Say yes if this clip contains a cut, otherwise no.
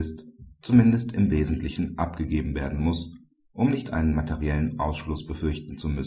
no